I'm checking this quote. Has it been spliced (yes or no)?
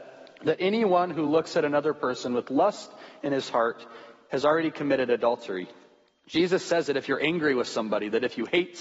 no